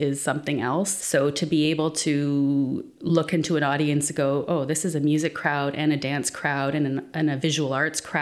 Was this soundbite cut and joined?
no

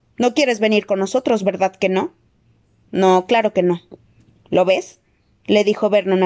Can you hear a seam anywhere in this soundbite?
no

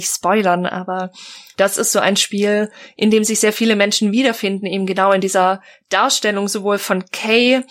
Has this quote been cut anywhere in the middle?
no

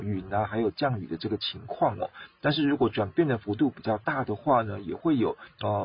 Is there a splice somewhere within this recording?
no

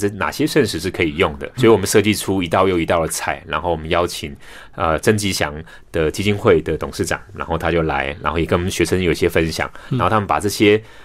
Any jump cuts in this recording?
yes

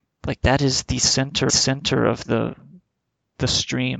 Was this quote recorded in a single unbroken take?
no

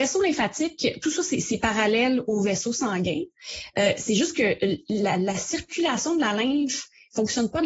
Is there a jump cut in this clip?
no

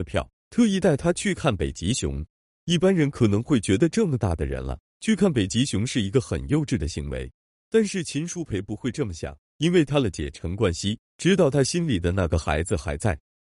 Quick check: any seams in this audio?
no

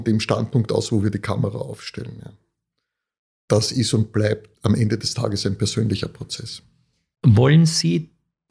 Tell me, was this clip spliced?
no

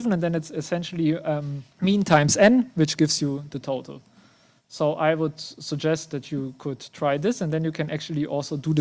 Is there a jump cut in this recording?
yes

